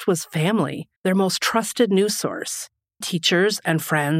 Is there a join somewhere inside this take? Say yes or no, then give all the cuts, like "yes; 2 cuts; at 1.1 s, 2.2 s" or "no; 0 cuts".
yes; 2 cuts; at 1.0 s, 3.0 s